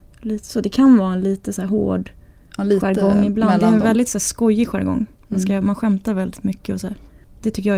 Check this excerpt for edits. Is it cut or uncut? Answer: uncut